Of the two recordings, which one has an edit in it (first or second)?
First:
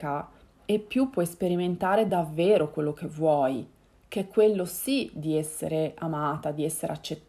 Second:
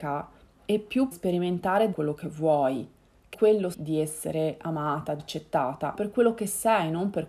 second